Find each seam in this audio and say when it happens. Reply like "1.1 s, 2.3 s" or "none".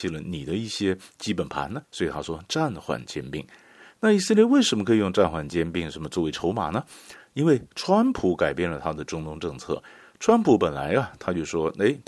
1.8 s